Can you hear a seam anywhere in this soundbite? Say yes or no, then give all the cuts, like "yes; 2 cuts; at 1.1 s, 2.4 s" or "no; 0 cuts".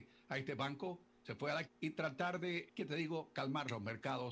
yes; 3 cuts; at 1.2 s, 1.6 s, 2.7 s